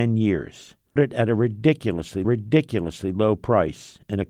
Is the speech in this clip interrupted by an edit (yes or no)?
yes